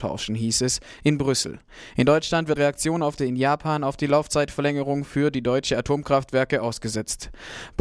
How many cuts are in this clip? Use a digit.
2